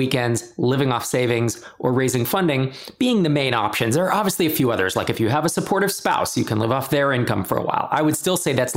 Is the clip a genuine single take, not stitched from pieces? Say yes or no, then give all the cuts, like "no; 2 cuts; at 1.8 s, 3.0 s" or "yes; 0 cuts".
yes; 0 cuts